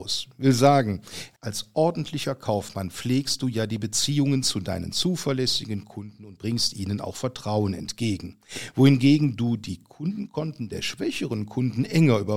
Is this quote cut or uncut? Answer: cut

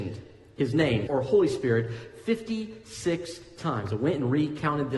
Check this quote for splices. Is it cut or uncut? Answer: cut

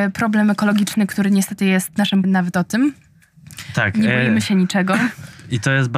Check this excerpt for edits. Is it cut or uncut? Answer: cut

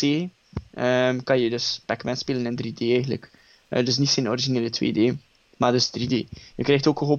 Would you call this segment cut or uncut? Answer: uncut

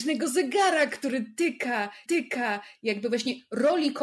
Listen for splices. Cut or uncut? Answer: cut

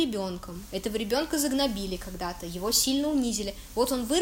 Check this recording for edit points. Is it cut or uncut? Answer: uncut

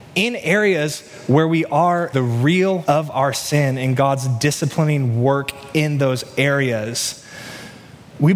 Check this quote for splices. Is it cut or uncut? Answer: cut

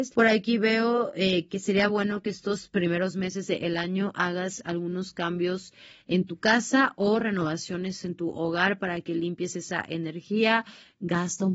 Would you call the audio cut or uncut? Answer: uncut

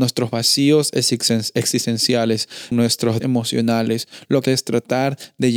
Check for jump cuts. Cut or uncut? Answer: cut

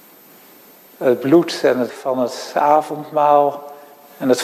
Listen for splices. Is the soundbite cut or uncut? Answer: cut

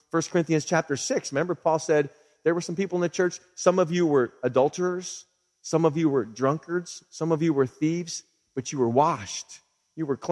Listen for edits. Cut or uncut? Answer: uncut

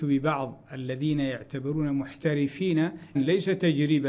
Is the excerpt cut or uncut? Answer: cut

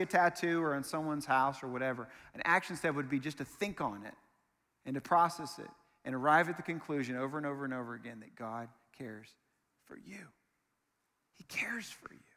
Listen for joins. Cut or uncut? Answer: uncut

